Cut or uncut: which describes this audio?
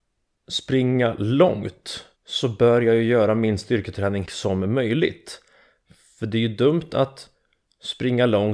cut